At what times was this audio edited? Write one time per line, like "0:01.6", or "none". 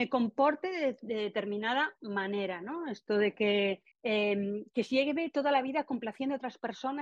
0:03.9